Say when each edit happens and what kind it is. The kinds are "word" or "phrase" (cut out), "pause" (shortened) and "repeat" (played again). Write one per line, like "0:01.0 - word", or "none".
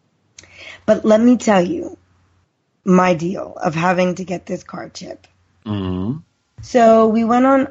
none